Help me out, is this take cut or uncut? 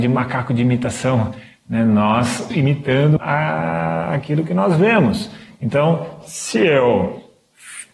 cut